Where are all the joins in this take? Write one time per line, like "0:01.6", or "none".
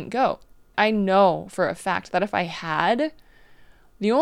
none